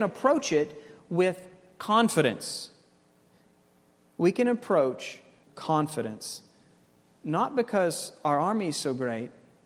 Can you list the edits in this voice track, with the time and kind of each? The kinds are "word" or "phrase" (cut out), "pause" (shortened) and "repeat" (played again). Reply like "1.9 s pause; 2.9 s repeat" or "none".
5.4 s phrase